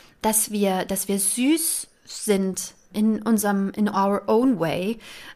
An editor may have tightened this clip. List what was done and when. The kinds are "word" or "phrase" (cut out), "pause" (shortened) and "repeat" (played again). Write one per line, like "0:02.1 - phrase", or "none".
0:02.9 - word